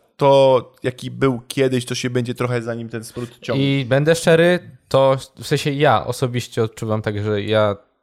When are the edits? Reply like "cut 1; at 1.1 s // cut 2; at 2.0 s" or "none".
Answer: none

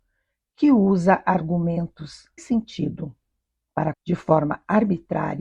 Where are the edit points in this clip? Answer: cut 1; at 2.4 s // cut 2; at 3.9 s

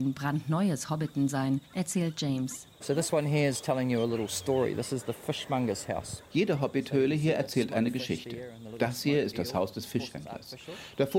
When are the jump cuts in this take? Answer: cut 1; at 1.6 s

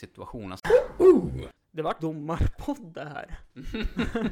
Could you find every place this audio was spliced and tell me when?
cut 1; at 2.0 s

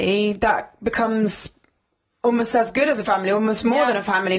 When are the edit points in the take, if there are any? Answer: none

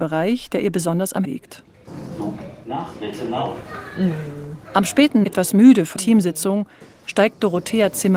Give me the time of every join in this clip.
cut 1; at 1.2 s // cut 2; at 5.2 s // cut 3; at 6.0 s

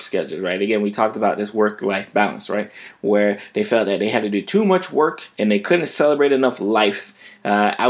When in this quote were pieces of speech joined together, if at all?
cut 1; at 5.3 s

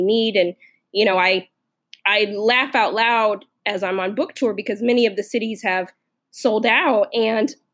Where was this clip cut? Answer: none

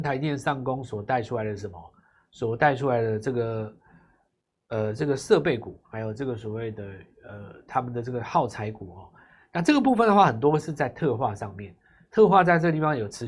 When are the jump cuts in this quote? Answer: none

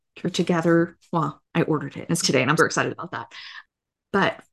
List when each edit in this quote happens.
cut 1; at 1.4 s // cut 2; at 2.2 s // cut 3; at 2.6 s

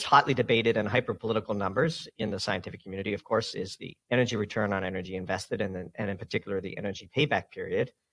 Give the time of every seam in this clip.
cut 1; at 4.0 s

